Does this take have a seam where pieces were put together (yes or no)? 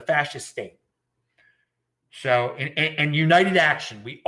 no